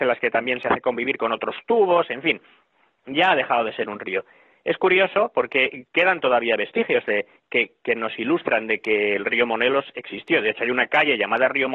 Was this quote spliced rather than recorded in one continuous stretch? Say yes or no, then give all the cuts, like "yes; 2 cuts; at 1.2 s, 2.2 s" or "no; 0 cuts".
no; 0 cuts